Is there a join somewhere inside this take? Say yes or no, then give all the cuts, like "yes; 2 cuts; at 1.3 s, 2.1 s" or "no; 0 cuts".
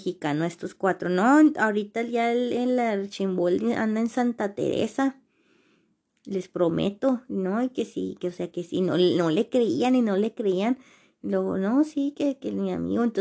no; 0 cuts